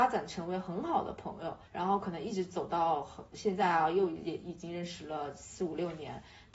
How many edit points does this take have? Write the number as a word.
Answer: one